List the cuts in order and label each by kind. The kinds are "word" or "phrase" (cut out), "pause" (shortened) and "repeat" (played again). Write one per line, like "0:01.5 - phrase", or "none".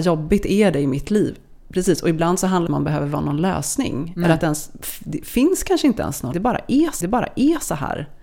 0:02.7 - phrase
0:06.3 - word
0:07.0 - repeat